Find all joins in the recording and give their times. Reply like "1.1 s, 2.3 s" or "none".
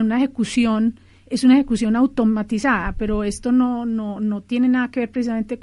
none